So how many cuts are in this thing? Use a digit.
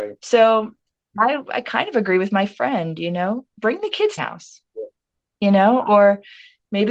2